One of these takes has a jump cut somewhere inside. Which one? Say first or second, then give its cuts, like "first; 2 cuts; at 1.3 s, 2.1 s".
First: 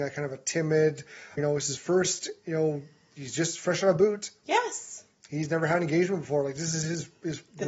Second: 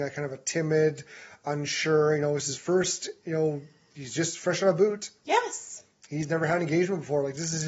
first; 1 cut; at 1.4 s